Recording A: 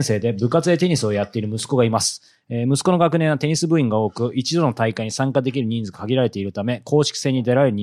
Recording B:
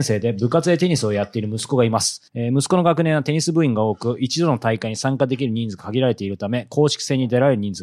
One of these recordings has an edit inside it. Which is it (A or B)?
B